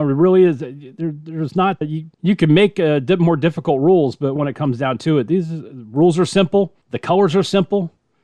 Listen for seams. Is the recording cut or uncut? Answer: cut